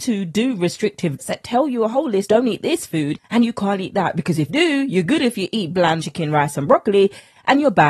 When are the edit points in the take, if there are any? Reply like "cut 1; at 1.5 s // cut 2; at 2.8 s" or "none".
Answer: cut 1; at 1.2 s // cut 2; at 2.3 s // cut 3; at 4.5 s // cut 4; at 6.0 s